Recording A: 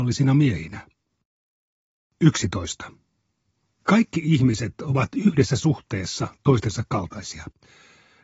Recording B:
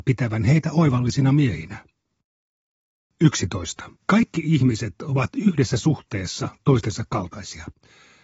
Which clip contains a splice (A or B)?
B